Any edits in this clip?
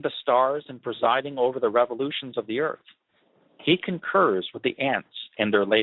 no; 0 cuts

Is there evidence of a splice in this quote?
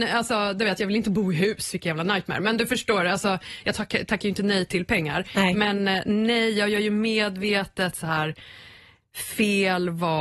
no; 0 cuts

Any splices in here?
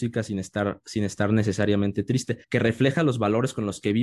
yes; 1 cut; at 2.4 s

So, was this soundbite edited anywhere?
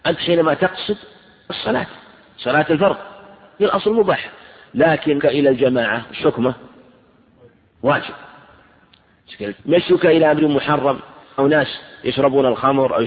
yes; 5 cuts; at 1.5 s, 3.6 s, 5.2 s, 9.5 s, 11.4 s

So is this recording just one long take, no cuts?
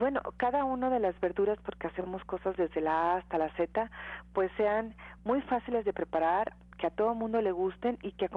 yes; 0 cuts

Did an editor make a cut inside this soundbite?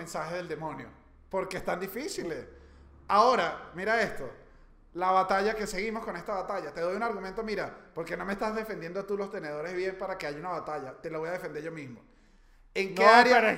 no; 0 cuts

